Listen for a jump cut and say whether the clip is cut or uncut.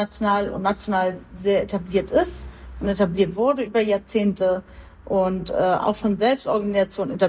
uncut